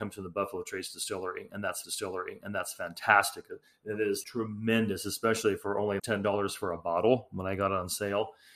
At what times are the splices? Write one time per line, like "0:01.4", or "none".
0:01.8
0:03.7
0:04.2
0:06.0